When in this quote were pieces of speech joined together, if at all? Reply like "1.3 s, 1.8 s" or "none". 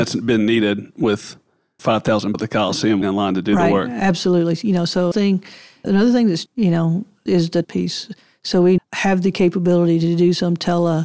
1.8 s, 2.3 s, 3.0 s, 5.1 s, 5.8 s, 6.5 s, 7.3 s, 7.6 s, 8.8 s